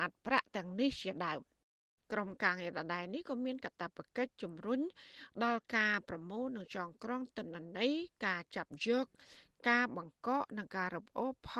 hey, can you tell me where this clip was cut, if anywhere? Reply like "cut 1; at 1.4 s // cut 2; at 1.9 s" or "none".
none